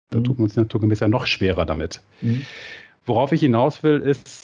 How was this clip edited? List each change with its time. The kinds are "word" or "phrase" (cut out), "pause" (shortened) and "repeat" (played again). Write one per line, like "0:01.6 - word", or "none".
none